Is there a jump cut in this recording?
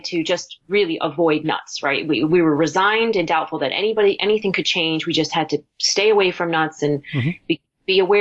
no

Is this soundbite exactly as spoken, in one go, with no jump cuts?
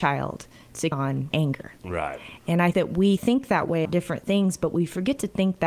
no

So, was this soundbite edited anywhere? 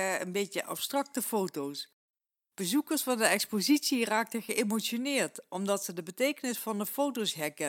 no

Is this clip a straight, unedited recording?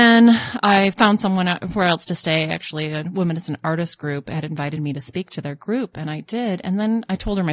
yes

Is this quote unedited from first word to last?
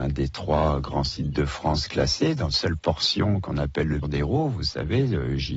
no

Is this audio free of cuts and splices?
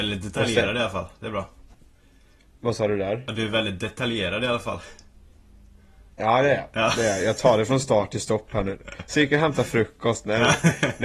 yes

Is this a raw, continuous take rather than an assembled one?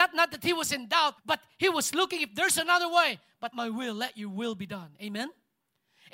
no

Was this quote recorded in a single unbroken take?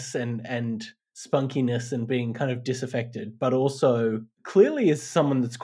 no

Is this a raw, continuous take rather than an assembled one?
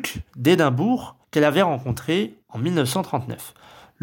no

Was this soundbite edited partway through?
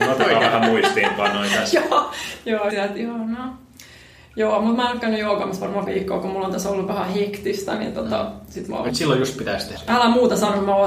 yes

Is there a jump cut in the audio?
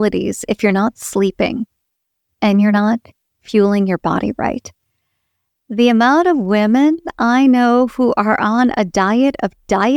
no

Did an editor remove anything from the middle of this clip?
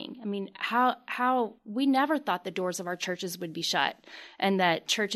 yes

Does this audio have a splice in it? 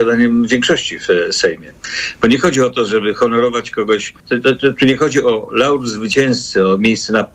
yes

